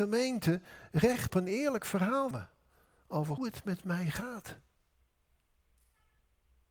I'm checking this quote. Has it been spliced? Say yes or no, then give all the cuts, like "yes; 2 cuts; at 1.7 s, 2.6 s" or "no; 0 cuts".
yes; 3 cuts; at 1.3 s, 2.3 s, 3.4 s